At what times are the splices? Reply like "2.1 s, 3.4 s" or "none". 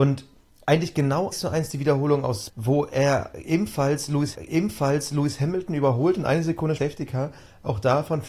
1.3 s, 2.5 s, 4.3 s, 6.8 s